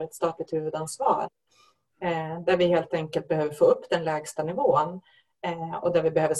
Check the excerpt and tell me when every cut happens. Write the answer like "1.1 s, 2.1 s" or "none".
none